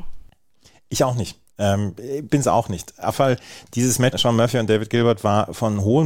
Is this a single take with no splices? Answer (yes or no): no